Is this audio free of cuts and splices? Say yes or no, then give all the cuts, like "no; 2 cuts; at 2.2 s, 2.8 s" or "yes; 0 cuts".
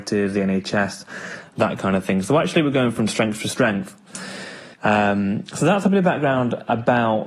no; 1 cut; at 4.7 s